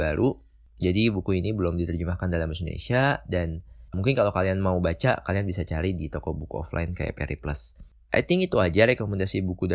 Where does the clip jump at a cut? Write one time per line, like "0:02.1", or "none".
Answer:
0:03.9